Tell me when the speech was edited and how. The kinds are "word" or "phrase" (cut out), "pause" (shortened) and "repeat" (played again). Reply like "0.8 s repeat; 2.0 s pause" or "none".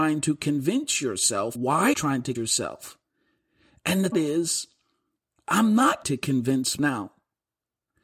1.5 s word; 1.9 s word; 2.3 s word; 4.1 s word; 6.0 s word; 6.8 s word

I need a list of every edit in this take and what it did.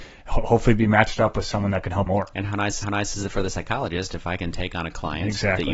2.1 s word; 2.8 s repeat

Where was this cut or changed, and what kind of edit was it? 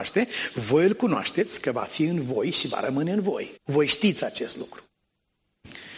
3.6 s pause

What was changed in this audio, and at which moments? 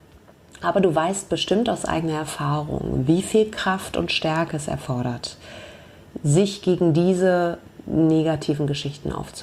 none

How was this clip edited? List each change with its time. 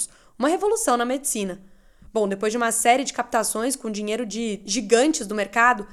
none

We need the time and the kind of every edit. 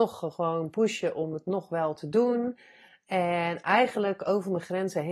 none

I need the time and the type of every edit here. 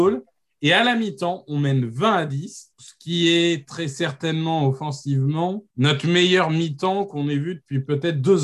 2.7 s word; 5.7 s pause

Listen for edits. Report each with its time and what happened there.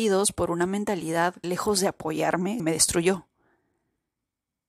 1.4 s word; 2.6 s word

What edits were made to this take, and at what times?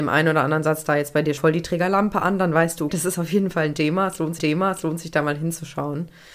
1.4 s word; 2.9 s word; 4.4 s repeat

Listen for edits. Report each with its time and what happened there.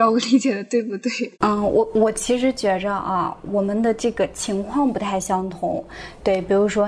1.3 s pause

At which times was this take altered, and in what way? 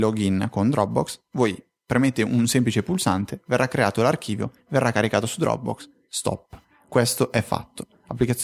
none

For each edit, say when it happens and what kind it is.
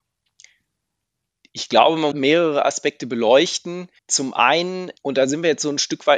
2.1 s phrase; 4.0 s pause; 5.0 s word

